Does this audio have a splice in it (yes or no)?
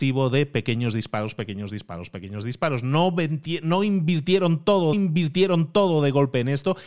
yes